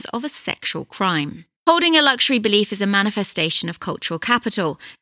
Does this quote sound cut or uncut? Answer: cut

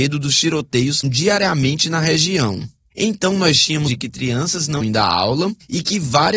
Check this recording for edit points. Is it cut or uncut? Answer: cut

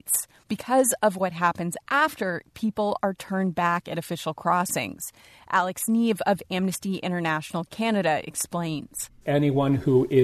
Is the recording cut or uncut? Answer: uncut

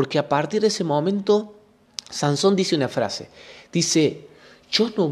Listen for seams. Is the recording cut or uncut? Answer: uncut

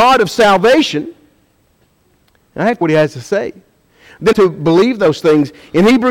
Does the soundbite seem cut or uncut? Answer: cut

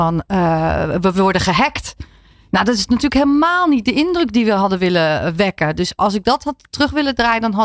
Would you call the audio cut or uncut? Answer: uncut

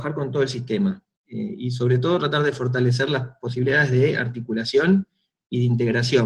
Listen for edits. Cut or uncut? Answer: uncut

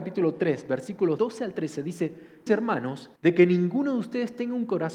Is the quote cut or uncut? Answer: cut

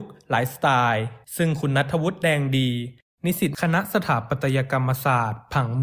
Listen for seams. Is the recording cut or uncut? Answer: cut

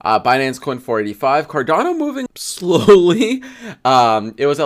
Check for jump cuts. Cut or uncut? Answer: cut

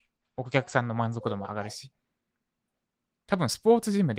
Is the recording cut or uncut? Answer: uncut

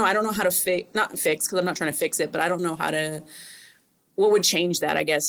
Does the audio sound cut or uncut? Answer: uncut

